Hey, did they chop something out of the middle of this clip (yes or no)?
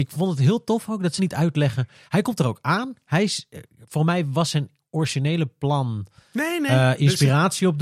yes